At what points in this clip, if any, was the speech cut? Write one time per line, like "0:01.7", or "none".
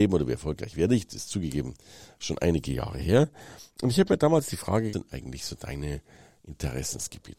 0:04.9